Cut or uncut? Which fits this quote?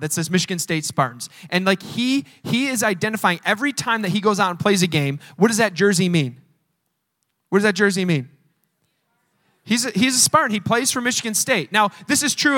uncut